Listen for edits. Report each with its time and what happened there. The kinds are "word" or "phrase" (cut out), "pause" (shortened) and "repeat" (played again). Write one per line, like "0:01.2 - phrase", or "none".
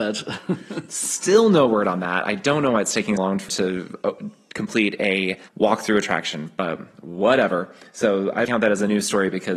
0:03.2 - word
0:03.5 - word
0:05.5 - pause
0:08.4 - phrase